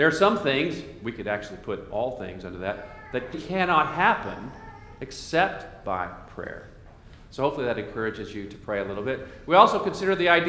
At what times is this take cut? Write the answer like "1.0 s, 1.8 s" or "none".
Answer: 3.3 s